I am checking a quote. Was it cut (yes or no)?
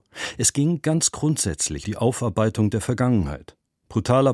yes